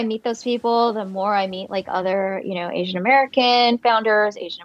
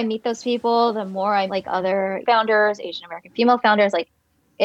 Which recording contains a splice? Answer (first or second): second